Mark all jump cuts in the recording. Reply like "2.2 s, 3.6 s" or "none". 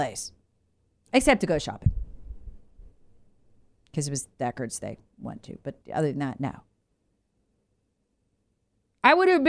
5.8 s